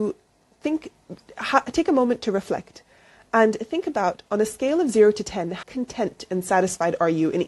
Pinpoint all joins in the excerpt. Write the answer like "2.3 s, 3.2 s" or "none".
5.6 s